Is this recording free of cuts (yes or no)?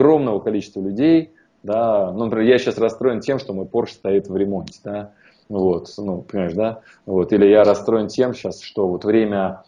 yes